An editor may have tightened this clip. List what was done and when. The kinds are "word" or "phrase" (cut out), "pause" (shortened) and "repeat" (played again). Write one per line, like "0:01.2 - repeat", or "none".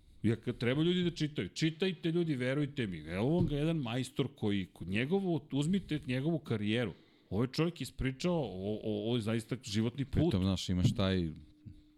none